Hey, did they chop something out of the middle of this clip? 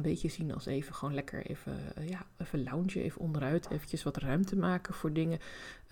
no; 0 cuts

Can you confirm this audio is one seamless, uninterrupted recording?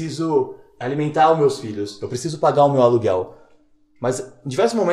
yes; 0 cuts

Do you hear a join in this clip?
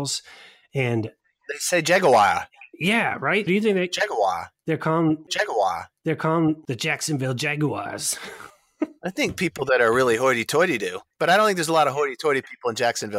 yes; 3 cuts; at 3.5 s, 5.3 s, 8.5 s

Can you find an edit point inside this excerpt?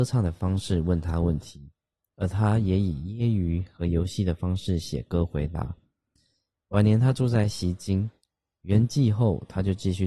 no; 0 cuts

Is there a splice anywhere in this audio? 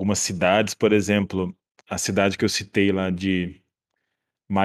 no; 0 cuts

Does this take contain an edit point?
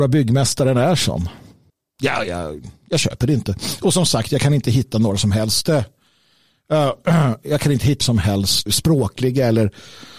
yes; 3 cuts; at 1.7 s, 8.0 s, 8.7 s

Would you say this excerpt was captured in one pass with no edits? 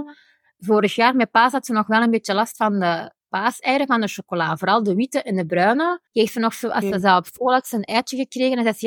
no; 1 cut; at 6.1 s

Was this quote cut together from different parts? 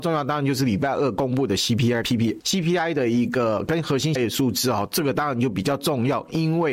yes; 3 cuts; at 2.0 s, 2.4 s, 4.2 s

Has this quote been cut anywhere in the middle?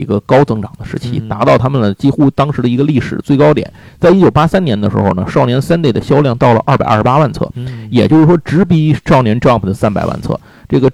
no; 0 cuts

